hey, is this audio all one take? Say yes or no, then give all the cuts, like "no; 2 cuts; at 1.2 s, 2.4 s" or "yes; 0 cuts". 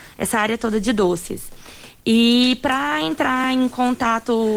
yes; 0 cuts